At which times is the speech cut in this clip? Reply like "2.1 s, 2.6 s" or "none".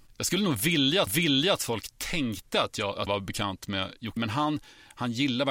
1.1 s, 3.1 s, 4.2 s